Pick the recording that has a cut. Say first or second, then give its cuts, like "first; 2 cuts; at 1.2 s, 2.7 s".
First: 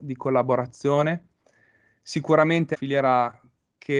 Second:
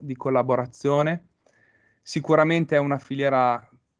first; 1 cut; at 2.7 s